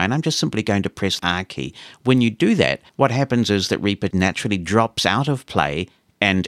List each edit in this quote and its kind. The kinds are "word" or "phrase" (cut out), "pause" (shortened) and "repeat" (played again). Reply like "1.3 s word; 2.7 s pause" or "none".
1.2 s word; 2.9 s pause; 4.1 s word